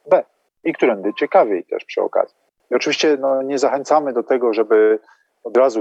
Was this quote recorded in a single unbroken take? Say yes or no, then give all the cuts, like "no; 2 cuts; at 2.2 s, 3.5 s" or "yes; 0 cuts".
yes; 0 cuts